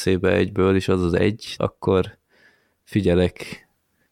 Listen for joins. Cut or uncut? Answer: cut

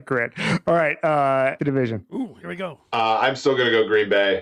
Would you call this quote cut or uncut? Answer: cut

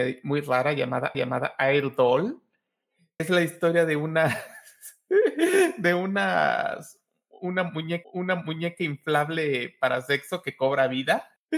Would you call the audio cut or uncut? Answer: cut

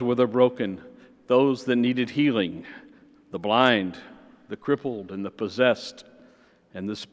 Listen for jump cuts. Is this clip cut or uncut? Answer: uncut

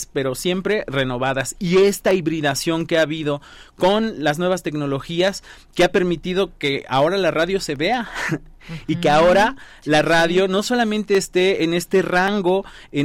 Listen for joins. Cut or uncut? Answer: uncut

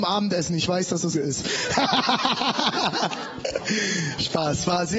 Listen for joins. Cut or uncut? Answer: cut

